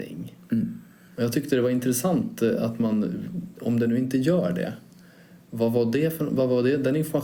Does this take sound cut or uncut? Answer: uncut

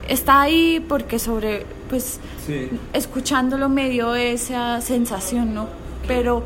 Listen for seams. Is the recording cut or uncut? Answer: uncut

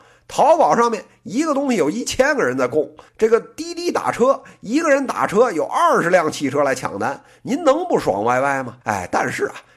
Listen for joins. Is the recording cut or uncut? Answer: cut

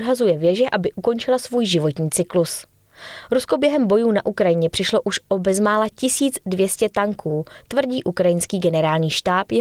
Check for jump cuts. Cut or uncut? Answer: uncut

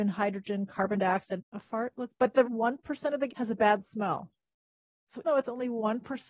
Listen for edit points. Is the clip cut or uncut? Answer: cut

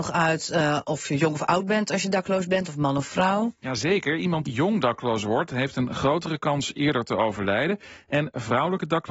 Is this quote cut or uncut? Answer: cut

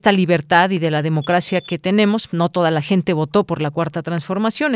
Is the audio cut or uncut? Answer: uncut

